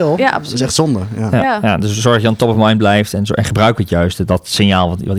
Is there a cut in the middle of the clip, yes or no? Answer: no